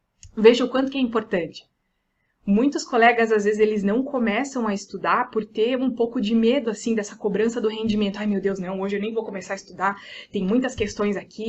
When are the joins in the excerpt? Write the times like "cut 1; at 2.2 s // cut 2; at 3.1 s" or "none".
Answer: none

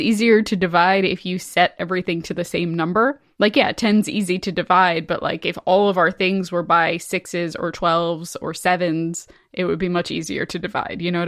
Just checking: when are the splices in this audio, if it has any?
none

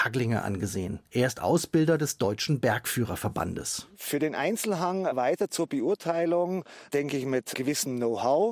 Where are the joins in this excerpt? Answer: none

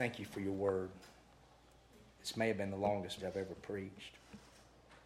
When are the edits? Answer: cut 1; at 3.2 s

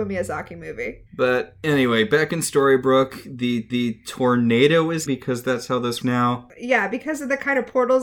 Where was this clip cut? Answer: cut 1; at 1.1 s // cut 2; at 3.7 s // cut 3; at 5.1 s // cut 4; at 6.0 s

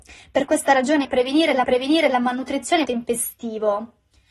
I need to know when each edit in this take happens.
cut 1; at 1.0 s // cut 2; at 1.6 s // cut 3; at 2.8 s

